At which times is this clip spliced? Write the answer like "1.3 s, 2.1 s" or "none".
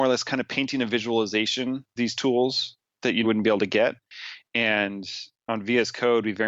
2.0 s, 3.2 s